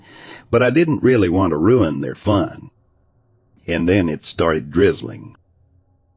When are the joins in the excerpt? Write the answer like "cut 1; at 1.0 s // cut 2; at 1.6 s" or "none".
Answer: none